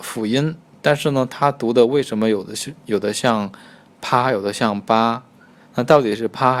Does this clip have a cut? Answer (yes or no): no